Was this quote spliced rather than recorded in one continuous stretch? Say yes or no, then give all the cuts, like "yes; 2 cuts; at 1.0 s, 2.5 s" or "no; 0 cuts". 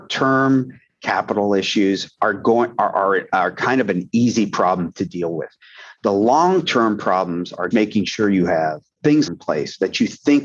yes; 2 cuts; at 7.7 s, 9.3 s